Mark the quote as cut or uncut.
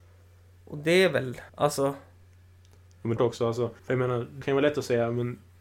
cut